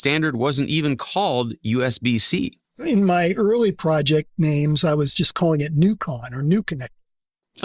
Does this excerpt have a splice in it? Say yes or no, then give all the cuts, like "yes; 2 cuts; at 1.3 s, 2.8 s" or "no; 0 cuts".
yes; 1 cut; at 2.6 s